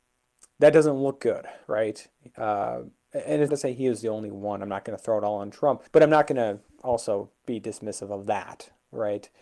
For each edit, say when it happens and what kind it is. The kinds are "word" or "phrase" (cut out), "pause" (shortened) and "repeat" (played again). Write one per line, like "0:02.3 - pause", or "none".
0:01.6 - pause
0:03.5 - word
0:05.9 - pause